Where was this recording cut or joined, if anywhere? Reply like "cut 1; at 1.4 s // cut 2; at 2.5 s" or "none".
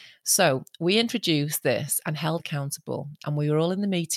cut 1; at 2.4 s